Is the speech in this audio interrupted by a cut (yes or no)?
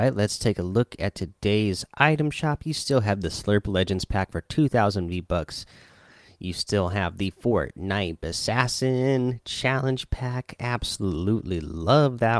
no